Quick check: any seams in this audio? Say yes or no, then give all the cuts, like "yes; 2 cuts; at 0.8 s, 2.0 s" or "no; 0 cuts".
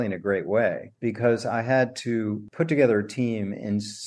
no; 0 cuts